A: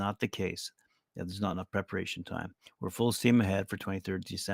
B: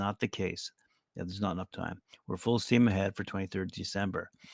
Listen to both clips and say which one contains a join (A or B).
B